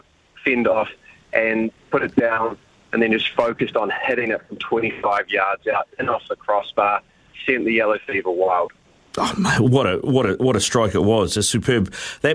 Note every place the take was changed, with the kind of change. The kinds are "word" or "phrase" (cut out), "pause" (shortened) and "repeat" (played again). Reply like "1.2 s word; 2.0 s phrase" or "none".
none